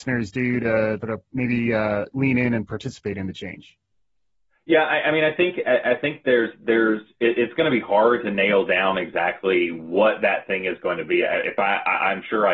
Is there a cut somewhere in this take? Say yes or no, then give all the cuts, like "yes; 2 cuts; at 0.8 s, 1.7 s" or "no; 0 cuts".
yes; 1 cut; at 1.0 s